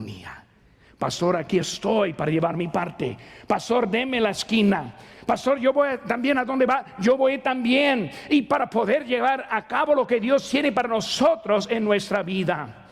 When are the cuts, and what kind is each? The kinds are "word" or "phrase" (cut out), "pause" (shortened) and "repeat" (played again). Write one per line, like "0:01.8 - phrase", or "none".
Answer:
none